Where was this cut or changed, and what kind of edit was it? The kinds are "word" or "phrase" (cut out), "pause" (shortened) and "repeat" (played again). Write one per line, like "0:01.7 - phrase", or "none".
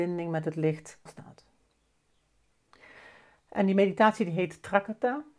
0:01.1 - word